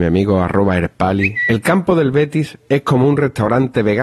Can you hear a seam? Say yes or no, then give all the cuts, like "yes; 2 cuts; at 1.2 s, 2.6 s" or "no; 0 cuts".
no; 0 cuts